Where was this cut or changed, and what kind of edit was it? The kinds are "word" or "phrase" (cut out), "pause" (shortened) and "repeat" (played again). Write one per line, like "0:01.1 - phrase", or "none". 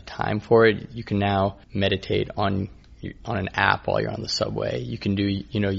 0:01.6 - pause